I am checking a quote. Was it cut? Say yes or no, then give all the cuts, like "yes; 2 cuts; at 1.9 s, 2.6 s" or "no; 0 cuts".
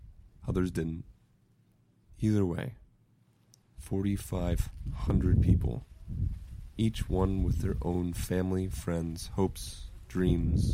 no; 0 cuts